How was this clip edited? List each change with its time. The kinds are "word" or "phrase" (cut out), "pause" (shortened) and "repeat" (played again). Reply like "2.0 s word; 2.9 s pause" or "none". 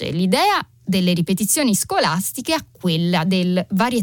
none

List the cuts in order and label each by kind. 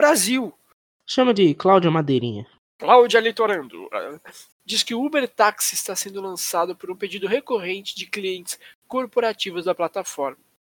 4.5 s pause

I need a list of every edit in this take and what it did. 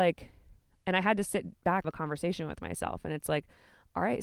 1.8 s phrase

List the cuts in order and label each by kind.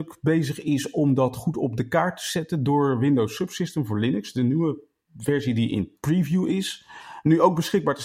none

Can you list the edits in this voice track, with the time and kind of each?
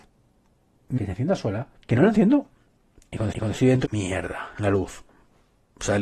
1.0 s phrase; 1.7 s pause; 3.3 s repeat; 3.8 s word

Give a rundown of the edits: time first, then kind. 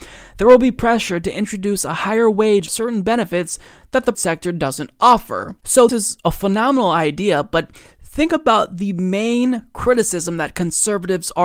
2.7 s word; 4.1 s word; 5.9 s word

